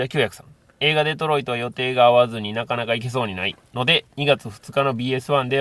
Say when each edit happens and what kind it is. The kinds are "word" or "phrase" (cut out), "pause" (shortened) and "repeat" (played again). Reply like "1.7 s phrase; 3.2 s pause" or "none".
4.1 s pause